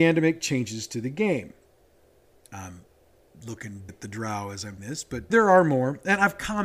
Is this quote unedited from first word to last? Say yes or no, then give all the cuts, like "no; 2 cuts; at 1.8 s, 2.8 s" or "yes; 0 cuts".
no; 3 cuts; at 3.9 s, 4.8 s, 5.3 s